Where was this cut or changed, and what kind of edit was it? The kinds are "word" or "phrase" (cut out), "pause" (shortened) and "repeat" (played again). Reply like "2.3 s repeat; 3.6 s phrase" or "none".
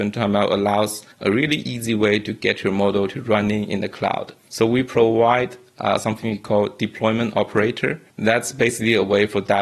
1.1 s pause; 4.4 s pause; 8.1 s pause

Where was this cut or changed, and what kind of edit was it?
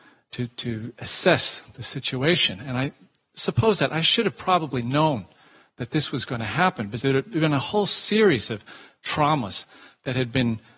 none

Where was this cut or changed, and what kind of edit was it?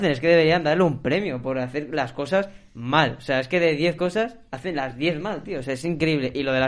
none

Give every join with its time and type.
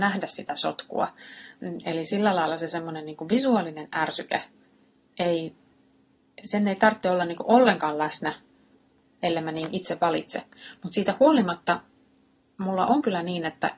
none

